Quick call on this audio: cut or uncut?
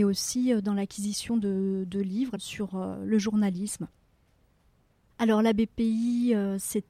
uncut